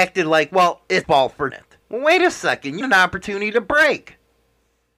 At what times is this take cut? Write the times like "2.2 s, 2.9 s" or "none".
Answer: 1.0 s, 1.5 s, 1.8 s, 2.8 s